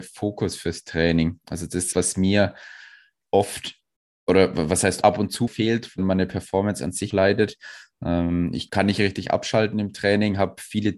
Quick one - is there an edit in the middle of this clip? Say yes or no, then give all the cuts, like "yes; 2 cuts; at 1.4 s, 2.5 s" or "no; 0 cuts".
yes; 6 cuts; at 1.9 s, 5.0 s, 5.5 s, 6.0 s, 7.1 s, 8.7 s